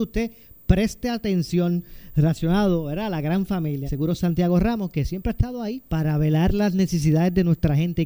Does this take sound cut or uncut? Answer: cut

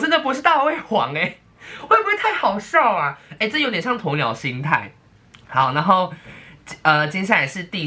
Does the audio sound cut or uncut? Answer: uncut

